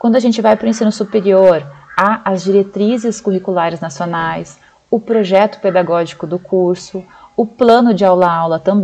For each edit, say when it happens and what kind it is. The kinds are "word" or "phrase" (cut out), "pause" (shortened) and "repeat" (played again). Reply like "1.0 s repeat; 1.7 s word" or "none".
none